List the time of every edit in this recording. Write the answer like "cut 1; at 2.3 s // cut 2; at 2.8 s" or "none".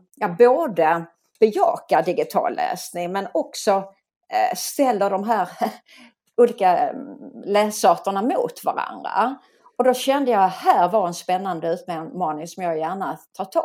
none